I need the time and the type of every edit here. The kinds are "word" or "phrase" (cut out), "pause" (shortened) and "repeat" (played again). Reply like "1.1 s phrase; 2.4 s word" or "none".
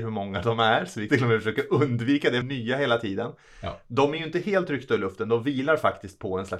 1.1 s word; 2.4 s phrase

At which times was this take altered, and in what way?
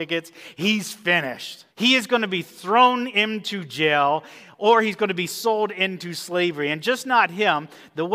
1.7 s pause

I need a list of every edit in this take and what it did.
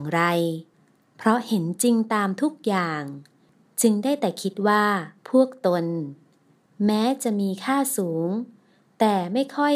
5.2 s pause

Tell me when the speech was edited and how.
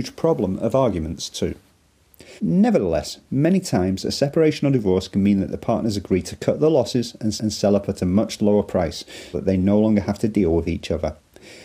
2.4 s pause; 7.4 s repeat; 9.3 s word

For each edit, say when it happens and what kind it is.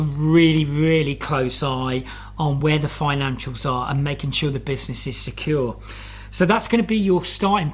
none

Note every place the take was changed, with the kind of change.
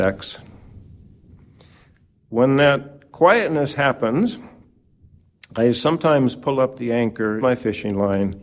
7.4 s word

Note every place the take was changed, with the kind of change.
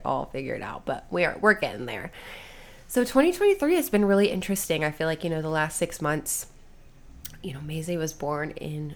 none

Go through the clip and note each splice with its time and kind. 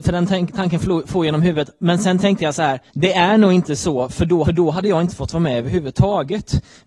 2.9 s pause; 4.4 s repeat

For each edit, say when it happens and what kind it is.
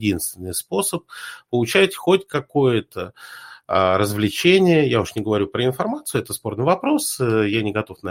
none

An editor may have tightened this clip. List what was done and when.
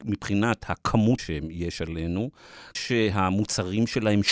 1.2 s word; 2.7 s word

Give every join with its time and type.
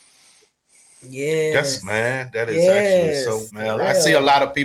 1.8 s word; 3.5 s phrase

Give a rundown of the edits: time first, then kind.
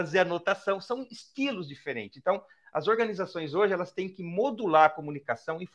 none

